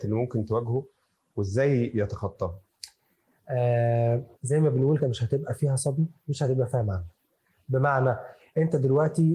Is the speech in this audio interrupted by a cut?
yes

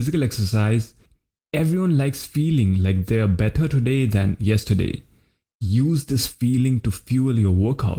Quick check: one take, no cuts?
yes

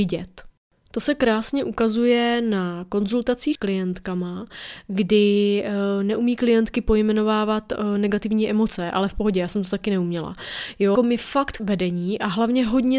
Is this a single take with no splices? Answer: no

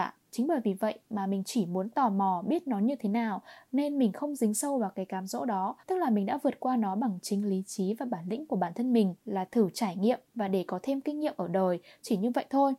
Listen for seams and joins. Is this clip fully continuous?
no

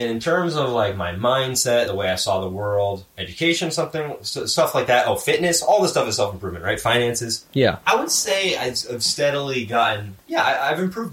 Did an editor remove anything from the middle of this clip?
no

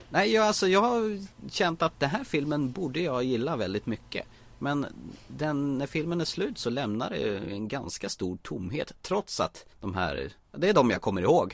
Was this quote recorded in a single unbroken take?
yes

